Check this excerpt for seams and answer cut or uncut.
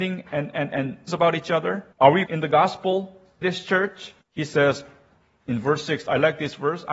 cut